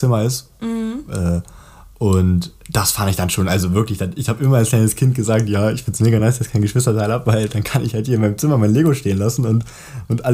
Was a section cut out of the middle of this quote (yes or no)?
no